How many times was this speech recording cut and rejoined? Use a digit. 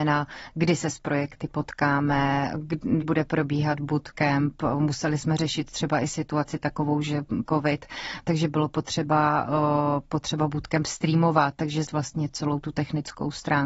3